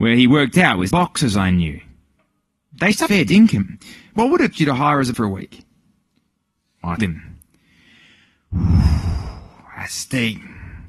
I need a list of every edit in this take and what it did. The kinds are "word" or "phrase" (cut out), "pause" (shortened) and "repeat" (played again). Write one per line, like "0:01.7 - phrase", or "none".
0:00.9 - word
0:03.1 - word
0:04.5 - word
0:05.1 - word
0:07.0 - word

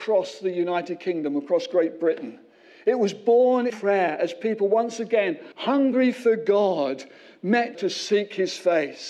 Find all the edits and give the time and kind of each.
0:03.7 - word
0:05.5 - pause
0:07.7 - word

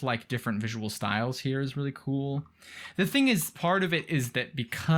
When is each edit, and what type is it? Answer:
none

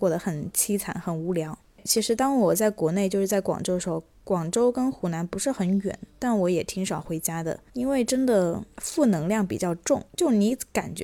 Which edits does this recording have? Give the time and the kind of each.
0:07.7 - pause
0:10.1 - pause

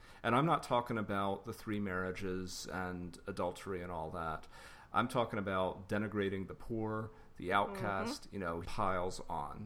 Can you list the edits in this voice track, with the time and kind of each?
0:08.7 - word

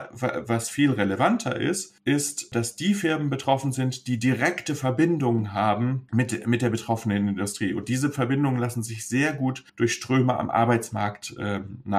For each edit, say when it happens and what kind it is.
0:09.7 - pause

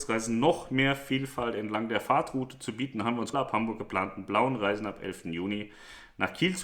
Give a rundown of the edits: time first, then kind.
0:03.3 - phrase

